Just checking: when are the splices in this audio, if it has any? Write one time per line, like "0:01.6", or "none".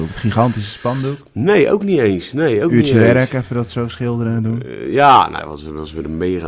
0:05.4